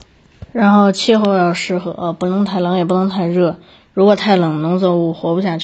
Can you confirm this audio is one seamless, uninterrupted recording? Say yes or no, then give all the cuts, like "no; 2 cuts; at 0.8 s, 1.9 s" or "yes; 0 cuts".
yes; 0 cuts